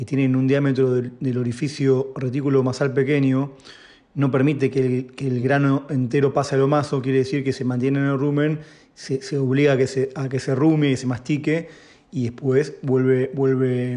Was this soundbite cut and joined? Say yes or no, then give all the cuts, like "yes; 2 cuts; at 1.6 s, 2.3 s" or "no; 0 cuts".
no; 0 cuts